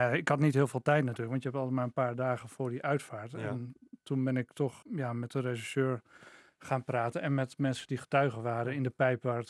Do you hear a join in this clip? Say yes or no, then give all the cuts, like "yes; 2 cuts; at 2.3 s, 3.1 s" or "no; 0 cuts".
yes; 1 cut; at 4.8 s